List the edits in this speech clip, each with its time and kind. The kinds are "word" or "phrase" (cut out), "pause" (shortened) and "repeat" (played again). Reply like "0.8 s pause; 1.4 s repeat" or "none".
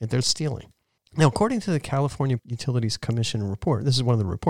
1.0 s pause; 2.4 s word

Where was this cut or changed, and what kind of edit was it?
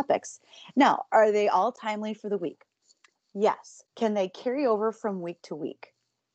3.9 s pause

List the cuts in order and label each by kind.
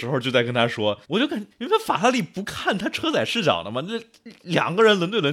1.0 s pause; 1.5 s pause

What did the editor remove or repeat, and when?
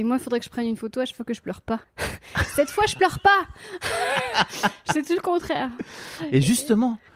1.8 s pause

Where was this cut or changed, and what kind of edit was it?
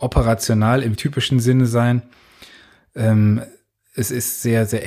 0.9 s word

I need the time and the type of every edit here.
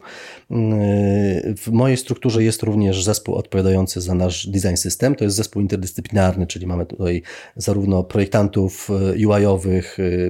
none

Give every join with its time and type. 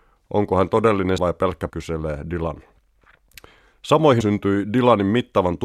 1.2 s word; 1.7 s word; 4.2 s word

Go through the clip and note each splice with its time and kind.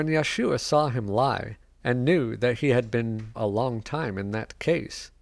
3.3 s word

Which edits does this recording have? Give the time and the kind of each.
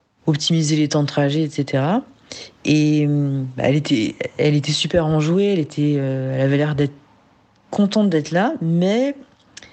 none

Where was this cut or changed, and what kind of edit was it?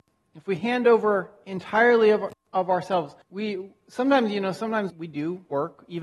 2.5 s pause; 3.2 s pause; 4.9 s word

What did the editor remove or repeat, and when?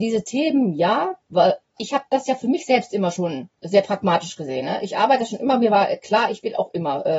1.2 s pause; 3.5 s pause

